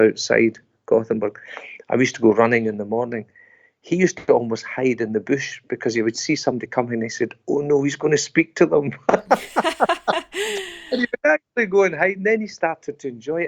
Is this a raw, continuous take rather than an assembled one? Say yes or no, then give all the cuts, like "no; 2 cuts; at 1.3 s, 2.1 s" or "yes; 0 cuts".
yes; 0 cuts